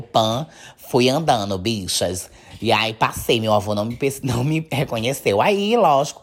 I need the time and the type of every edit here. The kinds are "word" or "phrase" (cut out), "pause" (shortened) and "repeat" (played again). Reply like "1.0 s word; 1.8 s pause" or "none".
none

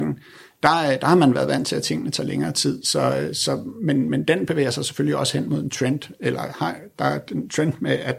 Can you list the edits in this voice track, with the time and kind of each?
none

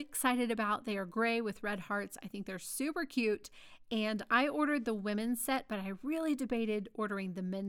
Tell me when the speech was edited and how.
none

